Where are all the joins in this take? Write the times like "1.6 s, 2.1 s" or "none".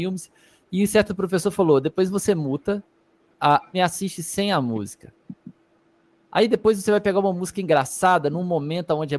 1.1 s, 3.7 s